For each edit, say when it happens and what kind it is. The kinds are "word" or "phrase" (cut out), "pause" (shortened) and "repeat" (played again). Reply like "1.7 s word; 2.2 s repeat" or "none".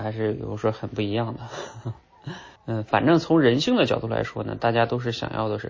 2.6 s pause